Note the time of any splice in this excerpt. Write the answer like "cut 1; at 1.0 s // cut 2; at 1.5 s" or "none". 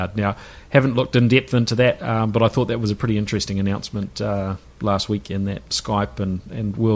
cut 1; at 5.7 s